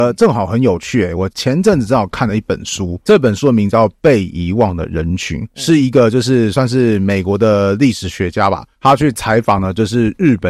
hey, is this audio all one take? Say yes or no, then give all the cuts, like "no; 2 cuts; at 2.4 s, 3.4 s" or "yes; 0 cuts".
no; 2 cuts; at 3.1 s, 8.7 s